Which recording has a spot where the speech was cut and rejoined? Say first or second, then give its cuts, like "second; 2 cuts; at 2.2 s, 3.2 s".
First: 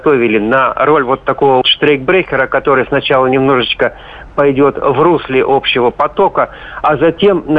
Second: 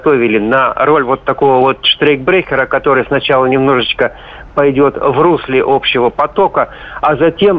first; 1 cut; at 1.6 s